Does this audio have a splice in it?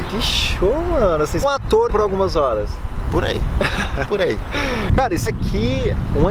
yes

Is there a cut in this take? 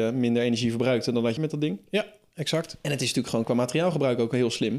yes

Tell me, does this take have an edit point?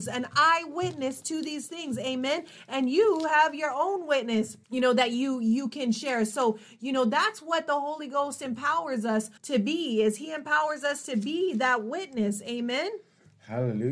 yes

